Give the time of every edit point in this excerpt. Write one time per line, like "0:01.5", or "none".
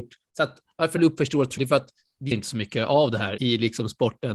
0:01.0
0:01.6
0:02.3
0:03.4

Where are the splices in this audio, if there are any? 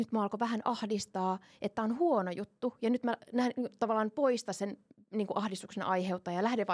none

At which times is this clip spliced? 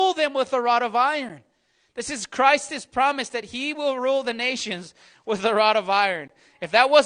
none

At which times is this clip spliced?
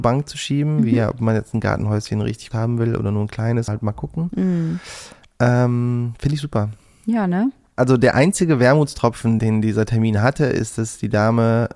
0:02.5
0:03.7
0:09.4

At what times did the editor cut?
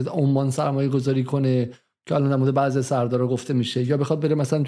none

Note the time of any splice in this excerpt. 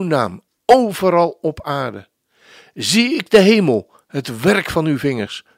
none

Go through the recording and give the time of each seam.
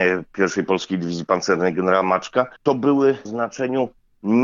0:02.6
0:03.2

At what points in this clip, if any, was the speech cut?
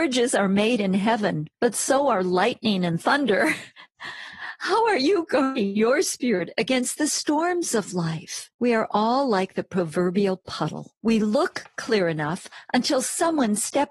0:01.5
0:08.5
0:11.0

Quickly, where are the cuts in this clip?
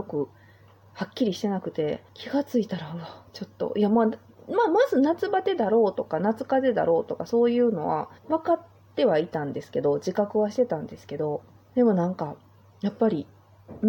0:02.1
0:08.2
0:11.6

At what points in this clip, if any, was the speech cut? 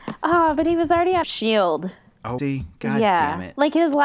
0:01.2
0:02.4

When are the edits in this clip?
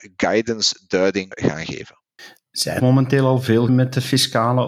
0:01.3
0:02.8
0:03.7

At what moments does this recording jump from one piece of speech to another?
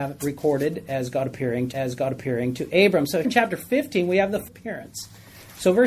0:01.7
0:03.2
0:04.5

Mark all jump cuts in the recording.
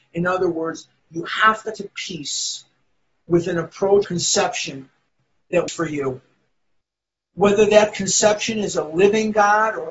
0:01.8
0:04.0
0:05.7

